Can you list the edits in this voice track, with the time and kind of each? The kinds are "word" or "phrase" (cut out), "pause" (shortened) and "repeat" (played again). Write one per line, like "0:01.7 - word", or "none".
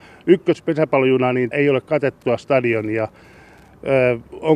0:01.5 - word